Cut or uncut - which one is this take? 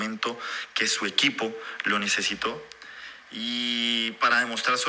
uncut